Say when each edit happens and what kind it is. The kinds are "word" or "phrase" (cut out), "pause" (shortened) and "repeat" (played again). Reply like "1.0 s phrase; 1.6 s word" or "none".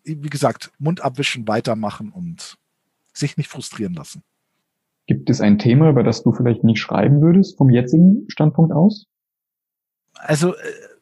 none